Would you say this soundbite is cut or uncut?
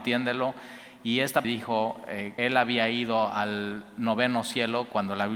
cut